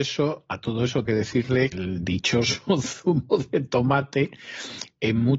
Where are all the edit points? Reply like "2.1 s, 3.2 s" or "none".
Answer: 1.1 s, 1.7 s